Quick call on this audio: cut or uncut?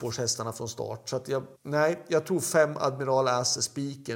cut